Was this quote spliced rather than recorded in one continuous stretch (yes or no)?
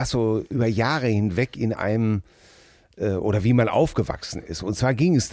no